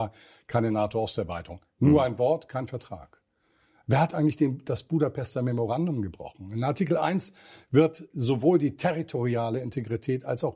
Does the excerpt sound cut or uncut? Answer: uncut